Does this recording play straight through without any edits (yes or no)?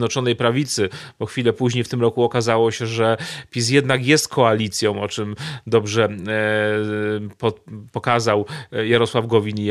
yes